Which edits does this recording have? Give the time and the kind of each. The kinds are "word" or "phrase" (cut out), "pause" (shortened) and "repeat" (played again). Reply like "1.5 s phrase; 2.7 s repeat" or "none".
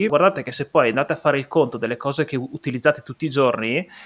none